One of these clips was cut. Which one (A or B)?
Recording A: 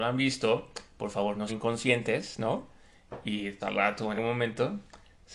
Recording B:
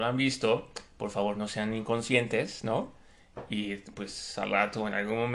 A